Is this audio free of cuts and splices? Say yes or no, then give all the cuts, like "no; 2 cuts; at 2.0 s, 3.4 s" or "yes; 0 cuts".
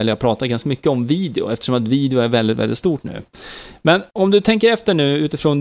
no; 1 cut; at 4.1 s